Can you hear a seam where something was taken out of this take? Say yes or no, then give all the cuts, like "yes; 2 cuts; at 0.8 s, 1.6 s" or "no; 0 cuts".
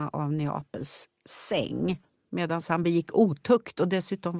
no; 0 cuts